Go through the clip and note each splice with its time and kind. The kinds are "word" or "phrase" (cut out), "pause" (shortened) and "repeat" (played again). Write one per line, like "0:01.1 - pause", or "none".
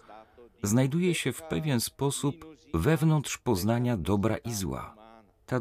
none